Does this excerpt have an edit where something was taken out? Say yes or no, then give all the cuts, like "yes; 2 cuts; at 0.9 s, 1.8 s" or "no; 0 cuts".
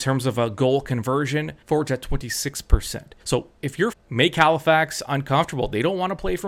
yes; 3 cuts; at 1.6 s, 3.2 s, 3.9 s